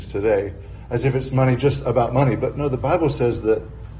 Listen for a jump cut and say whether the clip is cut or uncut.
uncut